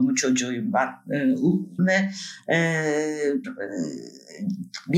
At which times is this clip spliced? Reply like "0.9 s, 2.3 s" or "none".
1.8 s, 3.4 s